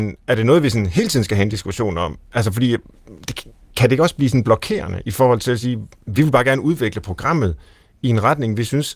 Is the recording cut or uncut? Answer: uncut